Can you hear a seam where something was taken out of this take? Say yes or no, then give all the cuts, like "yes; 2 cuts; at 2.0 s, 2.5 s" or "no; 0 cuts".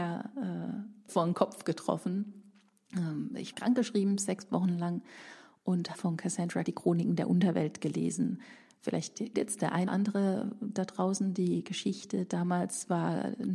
yes; 6 cuts; at 1.1 s, 3.5 s, 5.9 s, 6.7 s, 9.3 s, 9.9 s